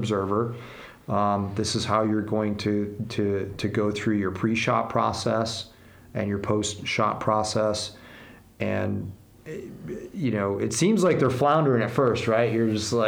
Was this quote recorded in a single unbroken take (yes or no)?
yes